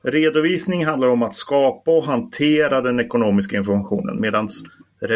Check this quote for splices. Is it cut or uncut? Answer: uncut